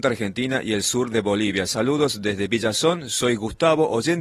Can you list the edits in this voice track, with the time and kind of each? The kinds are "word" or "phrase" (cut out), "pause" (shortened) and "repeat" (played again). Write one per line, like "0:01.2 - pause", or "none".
none

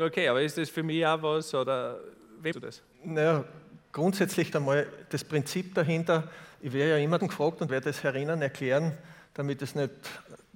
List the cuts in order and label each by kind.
0:02.5 - word
0:02.9 - pause
0:04.5 - phrase
0:07.2 - word
0:07.7 - phrase

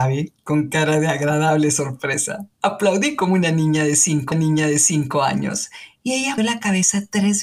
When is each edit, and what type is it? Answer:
0:02.5 - pause
0:04.3 - repeat
0:06.4 - word

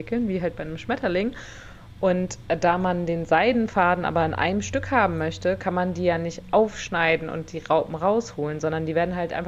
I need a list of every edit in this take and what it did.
none

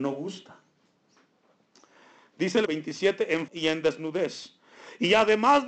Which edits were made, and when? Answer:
0:02.7 - word
0:03.5 - word

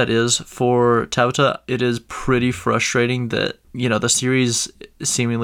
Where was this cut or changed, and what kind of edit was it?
0:03.6 - pause

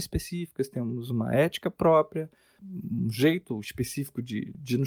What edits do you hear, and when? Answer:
none

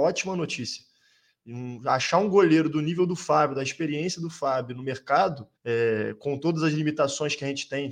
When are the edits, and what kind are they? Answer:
0:05.6 - pause

